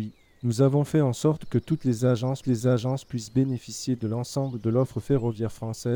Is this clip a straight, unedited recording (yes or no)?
no